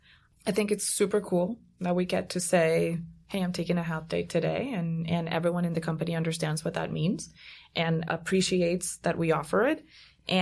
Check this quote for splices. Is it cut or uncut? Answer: cut